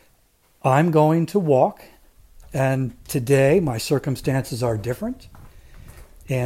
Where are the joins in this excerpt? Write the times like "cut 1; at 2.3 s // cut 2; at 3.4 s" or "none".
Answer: none